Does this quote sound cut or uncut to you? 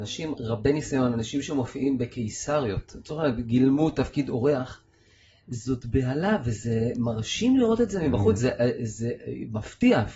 uncut